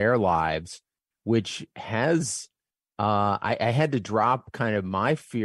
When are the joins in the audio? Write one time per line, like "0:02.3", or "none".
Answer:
none